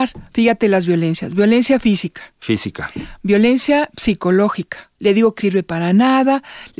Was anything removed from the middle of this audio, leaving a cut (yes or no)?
yes